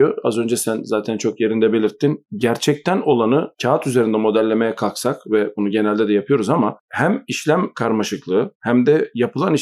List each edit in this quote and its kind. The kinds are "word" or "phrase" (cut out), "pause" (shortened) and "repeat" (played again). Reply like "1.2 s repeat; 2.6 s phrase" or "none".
none